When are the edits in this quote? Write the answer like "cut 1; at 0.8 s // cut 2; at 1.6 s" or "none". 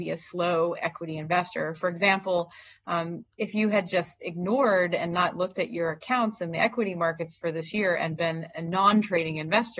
none